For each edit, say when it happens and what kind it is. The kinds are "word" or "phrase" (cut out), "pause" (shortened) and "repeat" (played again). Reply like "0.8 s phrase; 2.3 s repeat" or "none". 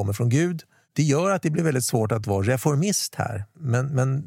none